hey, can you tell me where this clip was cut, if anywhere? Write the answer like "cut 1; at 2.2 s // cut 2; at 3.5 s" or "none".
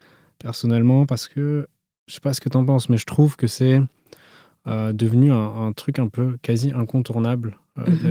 none